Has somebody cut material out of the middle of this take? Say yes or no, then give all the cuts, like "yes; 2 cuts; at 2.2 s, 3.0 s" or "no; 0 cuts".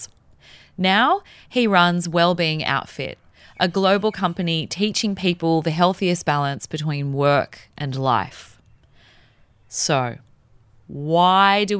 no; 0 cuts